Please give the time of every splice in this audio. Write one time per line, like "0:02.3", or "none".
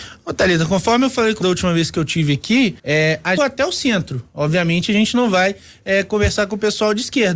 0:01.4
0:02.8
0:03.4